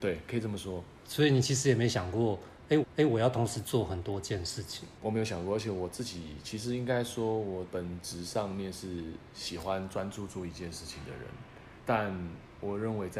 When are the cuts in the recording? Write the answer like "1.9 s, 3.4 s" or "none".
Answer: 2.8 s, 5.0 s, 11.8 s